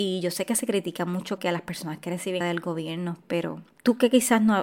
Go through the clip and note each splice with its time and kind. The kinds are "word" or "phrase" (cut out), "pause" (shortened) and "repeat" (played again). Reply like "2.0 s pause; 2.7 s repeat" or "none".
1.4 s word; 2.4 s word